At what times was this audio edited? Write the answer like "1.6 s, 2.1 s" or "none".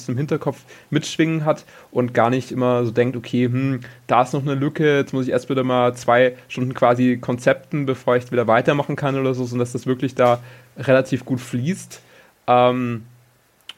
none